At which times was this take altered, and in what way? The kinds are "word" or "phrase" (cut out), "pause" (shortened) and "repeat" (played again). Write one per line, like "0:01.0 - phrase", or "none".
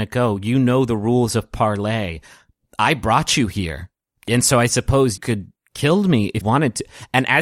0:04.0 - pause
0:05.2 - word
0:05.6 - word
0:06.4 - word

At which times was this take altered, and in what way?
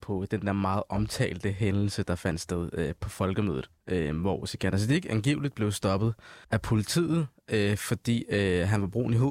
0:06.4 - pause

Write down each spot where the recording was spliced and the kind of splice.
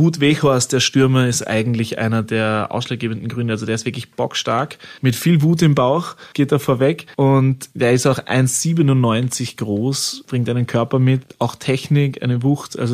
none

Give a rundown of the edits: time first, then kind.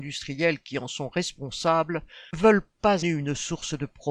0:02.3 - word
0:03.0 - word

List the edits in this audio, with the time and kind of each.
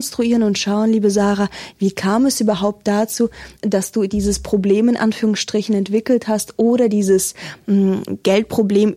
0:03.6 - pause

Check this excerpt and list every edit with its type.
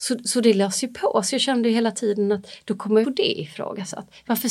0:03.0 - phrase

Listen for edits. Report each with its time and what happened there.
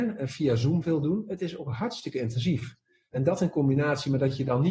none

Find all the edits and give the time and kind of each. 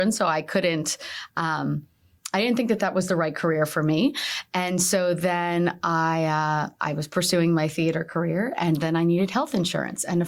none

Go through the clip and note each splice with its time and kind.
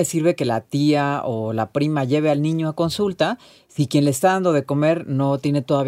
none

